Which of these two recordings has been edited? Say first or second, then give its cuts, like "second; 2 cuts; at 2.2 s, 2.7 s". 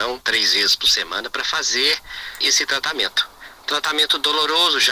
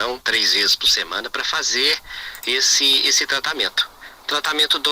first; 1 cut; at 2.4 s